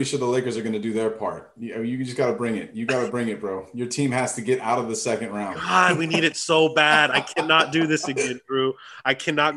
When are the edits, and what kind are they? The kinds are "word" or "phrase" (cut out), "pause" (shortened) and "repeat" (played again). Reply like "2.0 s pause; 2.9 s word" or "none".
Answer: none